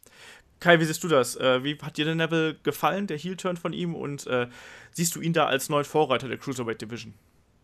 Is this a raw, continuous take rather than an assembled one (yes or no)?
yes